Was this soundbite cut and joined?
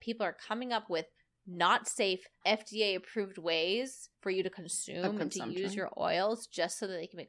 yes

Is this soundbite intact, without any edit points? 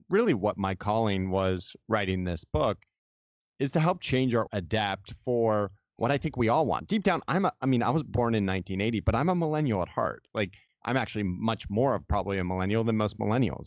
no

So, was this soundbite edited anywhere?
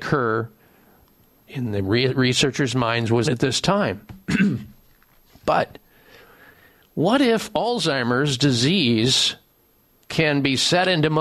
yes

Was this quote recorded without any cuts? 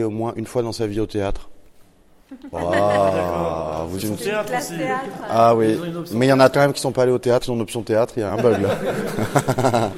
no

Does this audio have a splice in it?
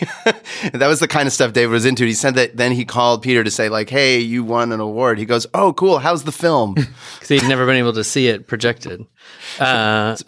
no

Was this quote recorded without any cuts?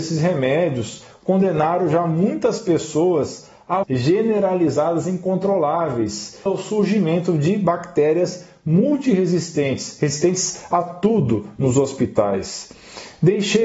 no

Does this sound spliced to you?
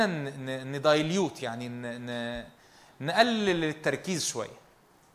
no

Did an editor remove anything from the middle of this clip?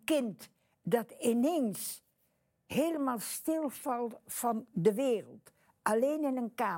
no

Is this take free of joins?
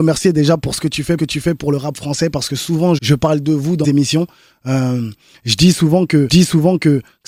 no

